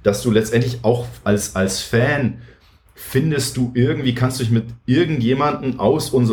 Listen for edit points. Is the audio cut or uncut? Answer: uncut